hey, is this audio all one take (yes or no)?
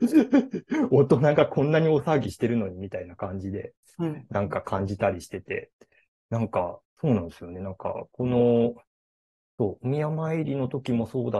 yes